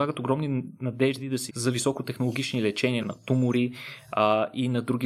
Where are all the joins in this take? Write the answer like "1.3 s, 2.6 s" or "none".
1.5 s, 3.0 s